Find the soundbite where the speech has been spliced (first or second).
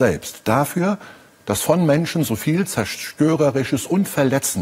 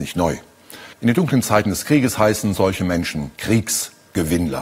second